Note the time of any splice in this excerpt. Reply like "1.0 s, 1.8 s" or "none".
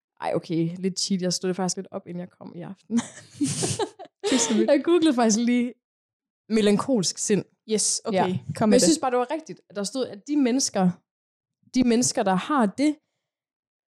1.7 s